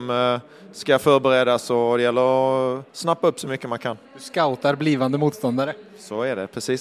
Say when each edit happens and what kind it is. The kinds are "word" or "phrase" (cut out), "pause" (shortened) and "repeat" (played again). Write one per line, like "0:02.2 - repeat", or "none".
0:02.9 - pause
0:04.0 - pause